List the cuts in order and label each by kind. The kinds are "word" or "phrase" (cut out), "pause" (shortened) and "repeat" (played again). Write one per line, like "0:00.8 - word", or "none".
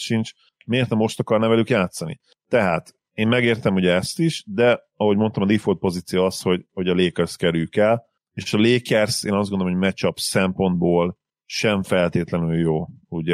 none